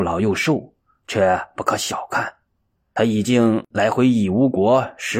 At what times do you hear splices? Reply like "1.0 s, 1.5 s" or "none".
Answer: none